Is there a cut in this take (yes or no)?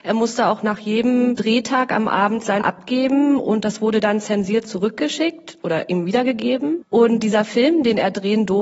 yes